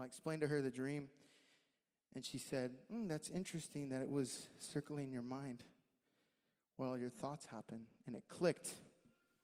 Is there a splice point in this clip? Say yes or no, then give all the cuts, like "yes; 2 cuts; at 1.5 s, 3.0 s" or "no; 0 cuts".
no; 0 cuts